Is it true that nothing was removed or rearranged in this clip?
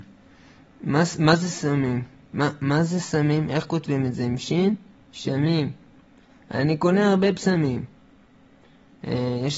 yes; 0 cuts

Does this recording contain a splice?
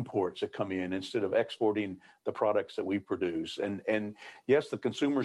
no; 0 cuts

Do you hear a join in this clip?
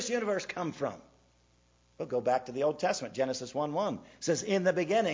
no; 0 cuts

